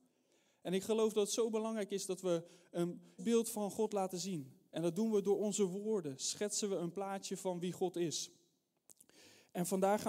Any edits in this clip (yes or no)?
yes